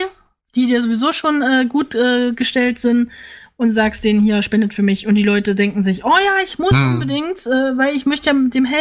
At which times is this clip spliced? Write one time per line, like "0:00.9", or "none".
none